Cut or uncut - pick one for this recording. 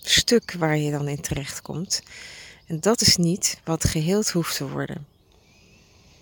uncut